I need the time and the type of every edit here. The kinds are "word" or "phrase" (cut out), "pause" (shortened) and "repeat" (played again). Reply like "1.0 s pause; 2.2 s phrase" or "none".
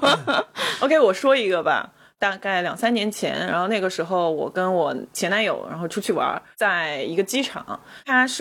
none